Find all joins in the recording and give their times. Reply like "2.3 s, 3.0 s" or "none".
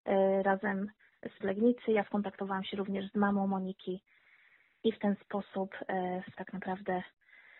1.4 s, 6.3 s